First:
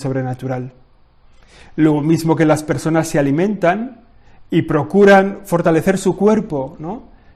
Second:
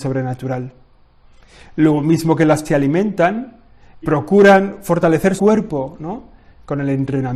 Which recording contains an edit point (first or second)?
second